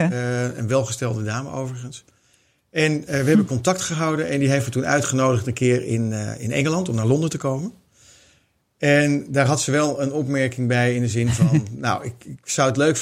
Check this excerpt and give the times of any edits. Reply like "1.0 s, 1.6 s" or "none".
none